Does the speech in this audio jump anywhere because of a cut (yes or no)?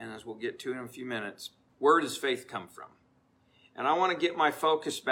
yes